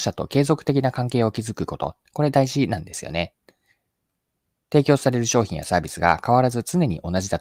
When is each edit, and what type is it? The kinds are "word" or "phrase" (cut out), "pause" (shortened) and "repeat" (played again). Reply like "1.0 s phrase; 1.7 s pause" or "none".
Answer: none